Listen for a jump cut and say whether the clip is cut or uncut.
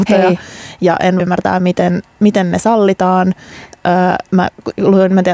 cut